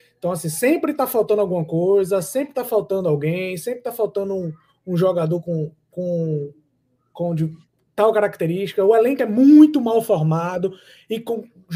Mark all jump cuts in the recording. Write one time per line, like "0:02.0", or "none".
none